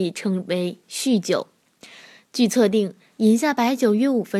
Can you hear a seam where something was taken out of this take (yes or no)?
no